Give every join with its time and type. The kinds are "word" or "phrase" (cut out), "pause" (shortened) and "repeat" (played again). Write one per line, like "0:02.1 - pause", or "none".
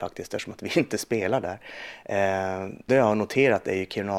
0:02.9 - phrase